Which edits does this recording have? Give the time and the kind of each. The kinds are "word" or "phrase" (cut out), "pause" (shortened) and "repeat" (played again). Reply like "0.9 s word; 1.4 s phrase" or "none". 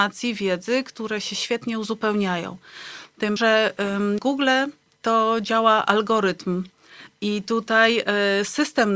3.4 s word; 4.2 s word